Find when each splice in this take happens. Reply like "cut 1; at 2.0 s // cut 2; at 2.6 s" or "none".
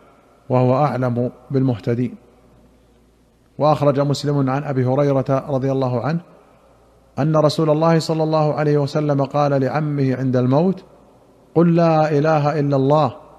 none